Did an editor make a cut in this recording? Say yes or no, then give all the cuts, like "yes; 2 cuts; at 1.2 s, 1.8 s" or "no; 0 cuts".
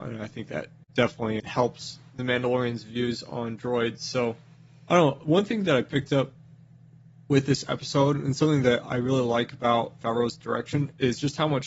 yes; 2 cuts; at 1.4 s, 10.0 s